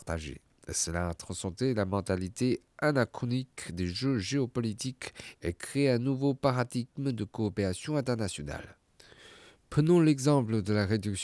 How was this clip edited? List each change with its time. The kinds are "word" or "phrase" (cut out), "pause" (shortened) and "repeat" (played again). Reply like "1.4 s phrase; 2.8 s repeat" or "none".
none